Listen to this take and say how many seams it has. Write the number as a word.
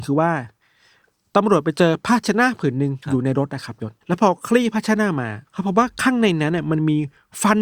three